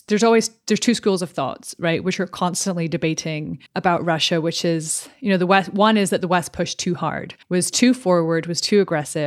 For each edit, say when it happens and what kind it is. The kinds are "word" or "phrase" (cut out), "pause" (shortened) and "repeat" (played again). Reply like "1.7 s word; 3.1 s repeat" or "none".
3.7 s pause; 7.4 s pause